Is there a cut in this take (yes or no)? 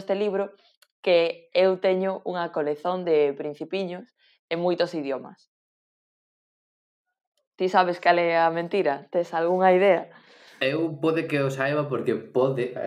no